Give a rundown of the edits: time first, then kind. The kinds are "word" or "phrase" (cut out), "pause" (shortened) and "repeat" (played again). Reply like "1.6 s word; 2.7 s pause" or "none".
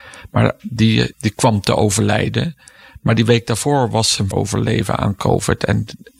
1.1 s word; 4.3 s word